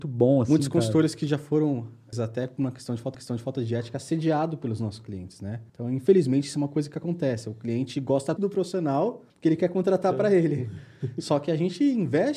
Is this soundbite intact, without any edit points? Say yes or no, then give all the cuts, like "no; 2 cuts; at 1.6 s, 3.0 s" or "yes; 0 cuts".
no; 5 cuts; at 2.1 s, 3.1 s, 5.7 s, 8.4 s, 9.3 s